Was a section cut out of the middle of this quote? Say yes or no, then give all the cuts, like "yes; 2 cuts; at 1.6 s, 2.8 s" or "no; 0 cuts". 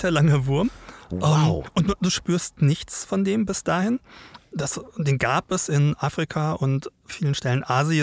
no; 0 cuts